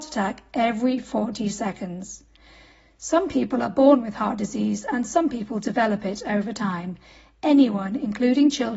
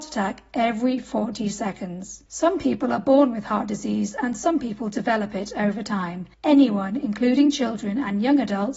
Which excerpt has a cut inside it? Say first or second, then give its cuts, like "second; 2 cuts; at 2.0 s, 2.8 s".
second; 2 cuts; at 2.3 s, 6.3 s